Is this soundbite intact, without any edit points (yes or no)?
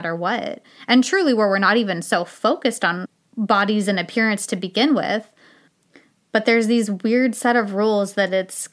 yes